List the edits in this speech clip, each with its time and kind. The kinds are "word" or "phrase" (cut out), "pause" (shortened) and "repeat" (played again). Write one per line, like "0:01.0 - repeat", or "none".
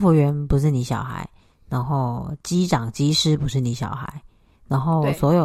none